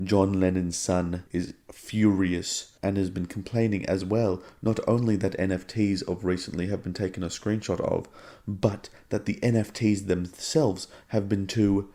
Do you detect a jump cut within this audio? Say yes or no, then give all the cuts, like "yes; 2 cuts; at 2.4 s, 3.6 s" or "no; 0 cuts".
yes; 2 cuts; at 1.3 s, 2.8 s